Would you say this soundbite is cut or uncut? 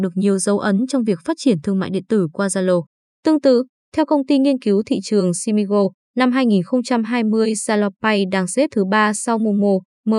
uncut